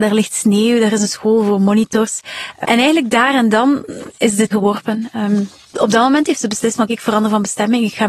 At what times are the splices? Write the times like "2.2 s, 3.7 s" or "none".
2.6 s, 4.5 s, 5.7 s, 6.9 s